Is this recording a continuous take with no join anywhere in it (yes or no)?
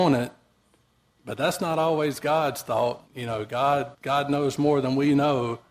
no